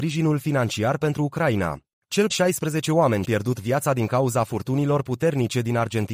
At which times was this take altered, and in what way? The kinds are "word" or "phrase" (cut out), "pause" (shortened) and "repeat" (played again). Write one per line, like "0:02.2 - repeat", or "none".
0:02.3 - word
0:03.2 - word